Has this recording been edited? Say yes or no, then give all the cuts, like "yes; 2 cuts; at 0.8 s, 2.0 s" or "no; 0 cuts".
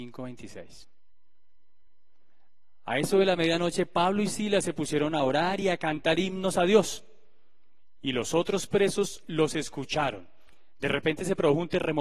no; 0 cuts